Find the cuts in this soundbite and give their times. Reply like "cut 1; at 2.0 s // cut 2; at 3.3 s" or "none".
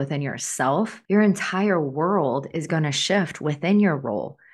cut 1; at 1.0 s